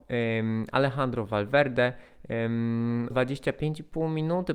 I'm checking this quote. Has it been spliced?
yes; 1 cut; at 3.1 s

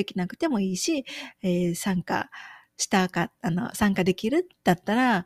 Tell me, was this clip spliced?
no; 0 cuts

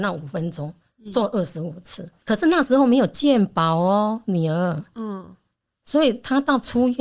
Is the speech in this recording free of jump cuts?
no; 1 cut; at 2.2 s

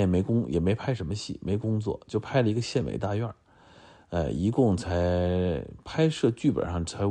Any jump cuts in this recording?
no; 0 cuts

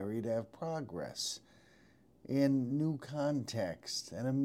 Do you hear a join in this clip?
no; 0 cuts

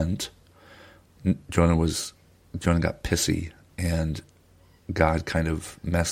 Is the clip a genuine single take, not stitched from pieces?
yes; 0 cuts

